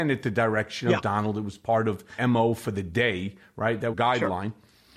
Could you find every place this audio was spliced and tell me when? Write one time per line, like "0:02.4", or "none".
0:02.2
0:03.9